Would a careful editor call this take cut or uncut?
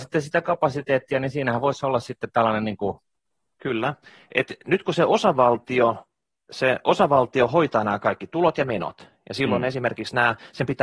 uncut